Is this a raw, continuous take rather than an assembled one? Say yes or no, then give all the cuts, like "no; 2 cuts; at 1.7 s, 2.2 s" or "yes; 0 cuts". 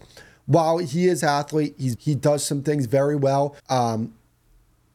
no; 3 cuts; at 1.2 s, 2.0 s, 3.6 s